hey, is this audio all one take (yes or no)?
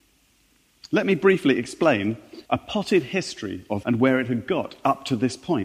no